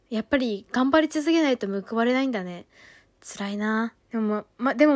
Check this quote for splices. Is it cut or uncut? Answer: cut